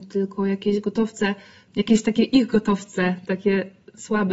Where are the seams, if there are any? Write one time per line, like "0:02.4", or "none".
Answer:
none